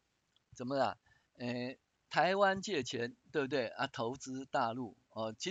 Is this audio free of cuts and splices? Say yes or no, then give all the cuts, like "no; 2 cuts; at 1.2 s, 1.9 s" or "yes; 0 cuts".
yes; 0 cuts